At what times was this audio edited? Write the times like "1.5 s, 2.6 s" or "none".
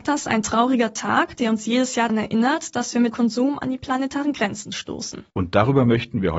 2.1 s, 3.1 s, 5.3 s